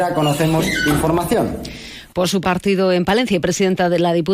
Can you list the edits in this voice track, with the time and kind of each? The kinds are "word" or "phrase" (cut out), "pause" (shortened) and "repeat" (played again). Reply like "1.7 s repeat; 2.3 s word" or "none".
2.4 s phrase

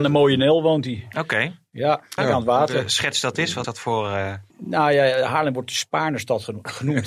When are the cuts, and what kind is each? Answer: 2.2 s word; 3.6 s word; 4.5 s pause

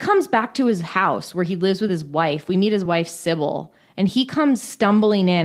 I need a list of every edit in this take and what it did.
none

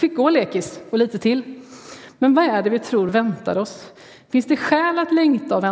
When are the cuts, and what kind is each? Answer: none

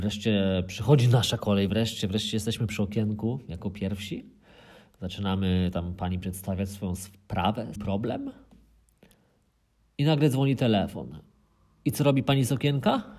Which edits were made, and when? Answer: 1.7 s word; 2.0 s word; 7.8 s word

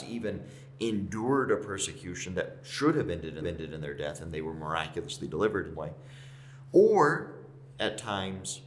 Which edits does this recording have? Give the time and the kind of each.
3.4 s repeat; 5.7 s word

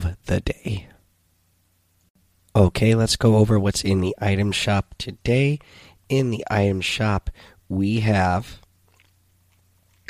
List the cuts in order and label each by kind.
none

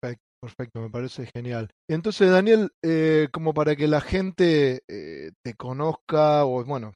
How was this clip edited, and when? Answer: 1.8 s pause

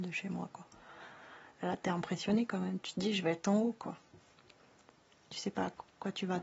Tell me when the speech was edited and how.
none

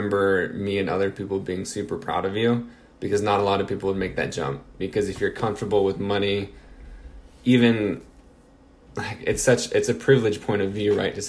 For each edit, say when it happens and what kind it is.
none

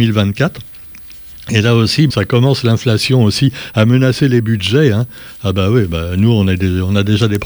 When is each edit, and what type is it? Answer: 2.1 s word

